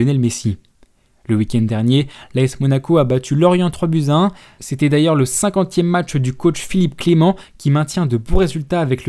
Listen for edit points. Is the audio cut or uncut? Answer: uncut